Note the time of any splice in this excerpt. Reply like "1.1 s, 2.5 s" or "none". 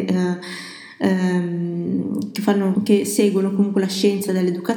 2.8 s